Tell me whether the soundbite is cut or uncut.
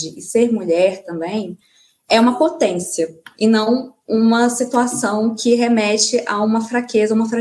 uncut